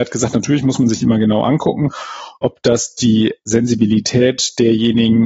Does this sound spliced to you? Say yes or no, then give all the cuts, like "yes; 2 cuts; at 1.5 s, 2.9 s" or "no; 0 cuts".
no; 0 cuts